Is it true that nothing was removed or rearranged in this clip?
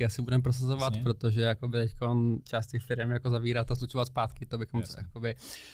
yes; 0 cuts

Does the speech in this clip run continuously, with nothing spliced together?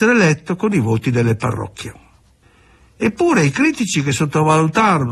yes; 0 cuts

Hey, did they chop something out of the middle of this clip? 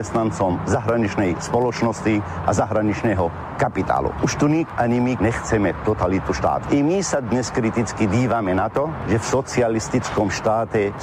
yes; 1 cut; at 5.2 s

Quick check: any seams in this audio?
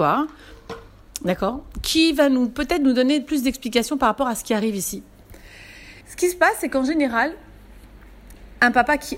yes; 1 cut; at 6.0 s

